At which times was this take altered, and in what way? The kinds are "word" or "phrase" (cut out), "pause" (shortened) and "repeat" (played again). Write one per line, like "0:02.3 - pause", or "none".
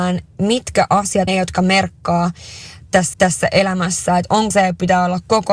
0:01.3 - phrase
0:03.1 - repeat
0:04.5 - word